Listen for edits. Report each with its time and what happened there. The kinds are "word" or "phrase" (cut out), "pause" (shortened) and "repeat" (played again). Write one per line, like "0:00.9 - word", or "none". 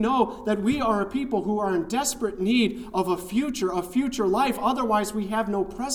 none